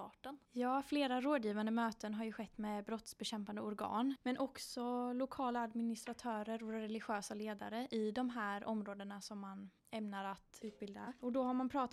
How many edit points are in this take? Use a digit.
1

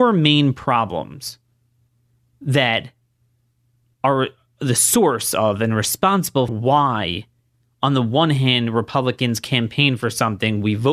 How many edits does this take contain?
1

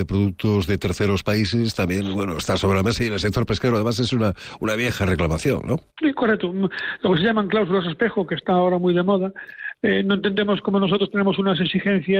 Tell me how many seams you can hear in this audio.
1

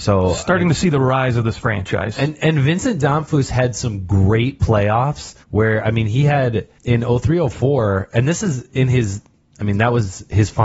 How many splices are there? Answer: 2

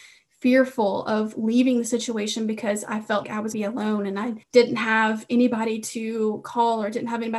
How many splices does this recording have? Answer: 3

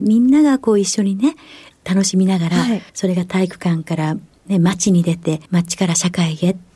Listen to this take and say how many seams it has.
2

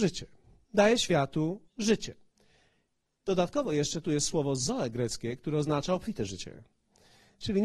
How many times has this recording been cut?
1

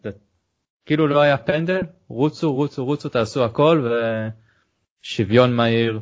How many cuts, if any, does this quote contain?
0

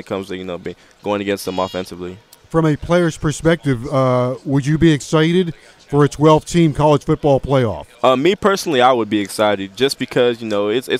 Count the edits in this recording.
1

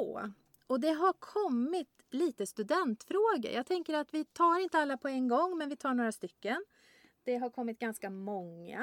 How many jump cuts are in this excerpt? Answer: 0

